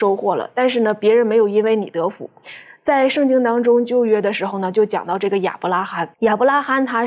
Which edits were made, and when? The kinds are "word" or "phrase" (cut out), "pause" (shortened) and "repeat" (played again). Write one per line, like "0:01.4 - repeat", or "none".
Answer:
0:06.1 - pause

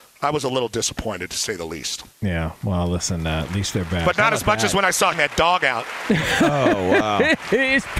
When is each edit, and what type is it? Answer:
0:02.1 - pause
0:05.1 - phrase

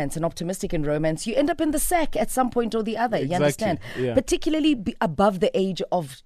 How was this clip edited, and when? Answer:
none

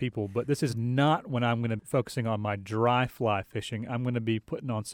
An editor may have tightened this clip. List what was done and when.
0:01.8 - word

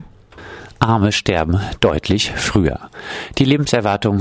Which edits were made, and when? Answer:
none

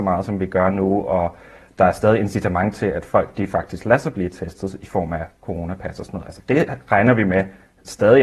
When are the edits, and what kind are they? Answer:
none

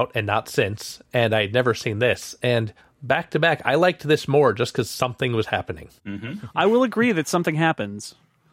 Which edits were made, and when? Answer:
0:02.8 - pause
0:06.0 - pause

